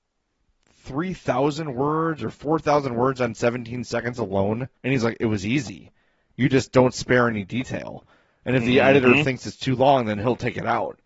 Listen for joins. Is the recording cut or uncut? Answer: cut